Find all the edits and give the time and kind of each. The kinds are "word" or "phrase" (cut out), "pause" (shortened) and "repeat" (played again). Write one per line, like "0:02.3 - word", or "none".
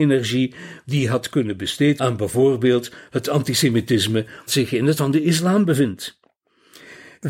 0:02.0 - word
0:04.5 - word
0:05.0 - word

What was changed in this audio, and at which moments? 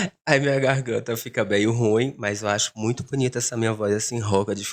none

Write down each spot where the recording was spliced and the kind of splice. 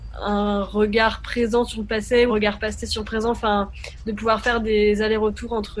0:02.3 - word

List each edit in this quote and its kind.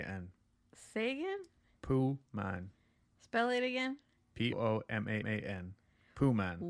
0:04.5 - word
0:05.2 - repeat

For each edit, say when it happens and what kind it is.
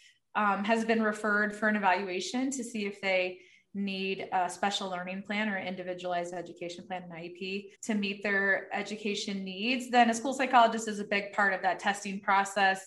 0:07.7 - pause

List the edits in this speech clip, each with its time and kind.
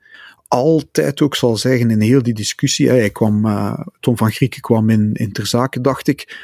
none

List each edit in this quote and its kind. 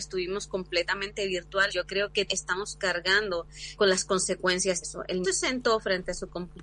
0:01.7 - word
0:02.3 - word
0:03.8 - word
0:04.8 - word
0:05.2 - phrase

